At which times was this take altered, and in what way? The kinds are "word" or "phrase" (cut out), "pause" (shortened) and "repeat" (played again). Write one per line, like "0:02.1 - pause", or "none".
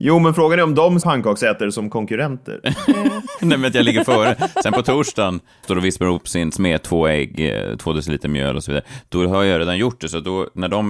0:01.0 - phrase
0:05.6 - phrase